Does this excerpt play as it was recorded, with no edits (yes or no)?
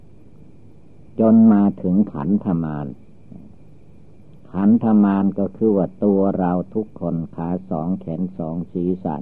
yes